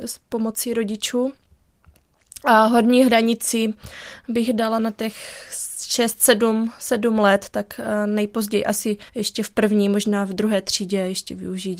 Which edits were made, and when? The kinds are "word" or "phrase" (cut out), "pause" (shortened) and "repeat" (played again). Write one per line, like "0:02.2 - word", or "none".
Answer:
0:09.1 - pause